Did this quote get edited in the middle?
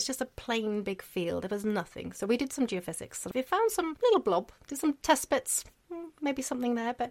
no; 0 cuts

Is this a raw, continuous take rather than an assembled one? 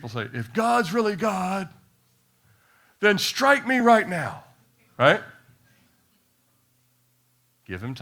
yes; 0 cuts

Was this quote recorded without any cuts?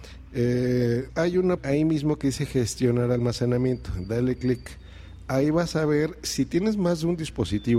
no; 2 cuts; at 1.1 s, 1.6 s

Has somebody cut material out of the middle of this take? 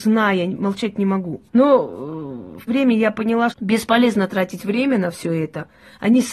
yes; 3 cuts; at 1.5 s, 2.7 s, 3.5 s

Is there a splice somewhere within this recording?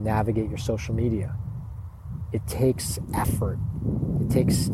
no; 0 cuts

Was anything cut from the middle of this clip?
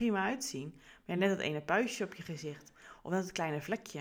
no; 0 cuts

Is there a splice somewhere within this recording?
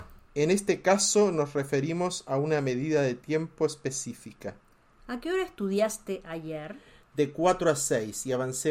no; 0 cuts

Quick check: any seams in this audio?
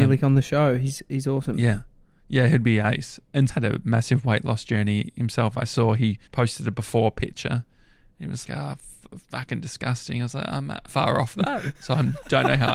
yes; 4 cuts; at 3.5 s, 6.3 s, 8.4 s, 10.9 s

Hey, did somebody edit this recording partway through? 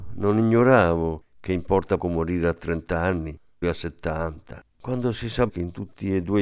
yes; 4 cuts; at 2.0 s, 3.6 s, 4.7 s, 5.5 s

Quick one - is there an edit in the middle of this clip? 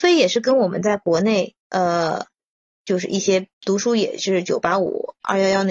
yes; 2 cuts; at 1.6 s, 3.5 s

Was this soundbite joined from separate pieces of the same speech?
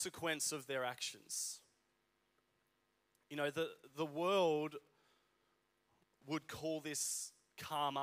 no; 0 cuts

